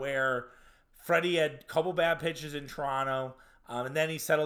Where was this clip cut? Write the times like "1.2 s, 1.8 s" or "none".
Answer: none